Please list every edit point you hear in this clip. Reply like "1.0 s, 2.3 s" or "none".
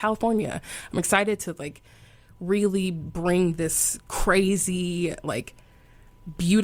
none

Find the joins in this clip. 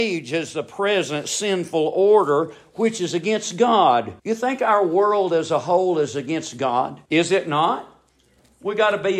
4.2 s, 7.1 s

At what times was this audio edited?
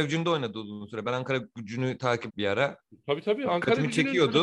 2.3 s

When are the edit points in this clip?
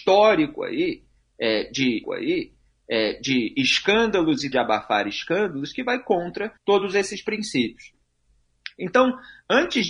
2.0 s, 4.5 s, 6.6 s

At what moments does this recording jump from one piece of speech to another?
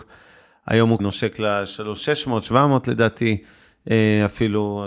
1.0 s

